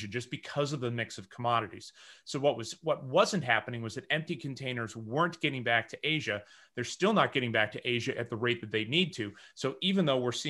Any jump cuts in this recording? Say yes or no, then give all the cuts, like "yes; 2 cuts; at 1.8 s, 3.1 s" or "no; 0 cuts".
no; 0 cuts